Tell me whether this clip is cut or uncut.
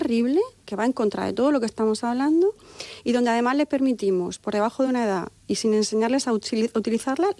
uncut